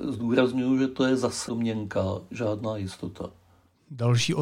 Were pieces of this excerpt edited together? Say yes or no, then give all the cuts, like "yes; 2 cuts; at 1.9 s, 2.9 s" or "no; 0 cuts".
yes; 1 cut; at 1.5 s